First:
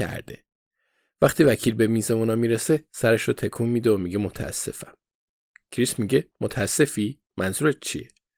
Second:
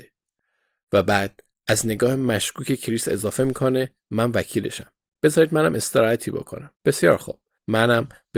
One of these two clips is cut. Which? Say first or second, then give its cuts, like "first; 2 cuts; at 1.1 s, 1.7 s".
second; 1 cut; at 6.7 s